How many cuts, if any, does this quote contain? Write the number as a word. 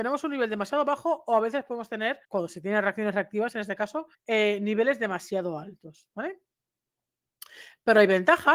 two